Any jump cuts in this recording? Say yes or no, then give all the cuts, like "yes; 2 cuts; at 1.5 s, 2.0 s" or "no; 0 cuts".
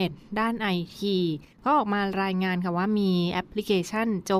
yes; 1 cut; at 1.5 s